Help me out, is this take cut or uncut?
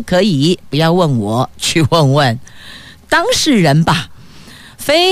uncut